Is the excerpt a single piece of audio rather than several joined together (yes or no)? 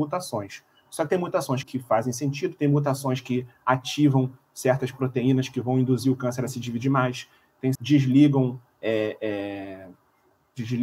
no